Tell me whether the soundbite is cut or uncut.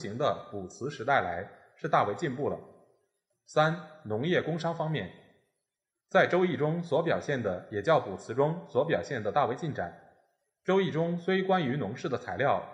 uncut